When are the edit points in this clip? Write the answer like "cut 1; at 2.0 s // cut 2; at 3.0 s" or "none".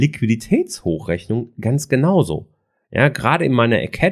none